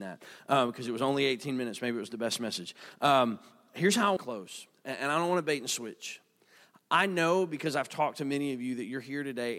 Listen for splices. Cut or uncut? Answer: cut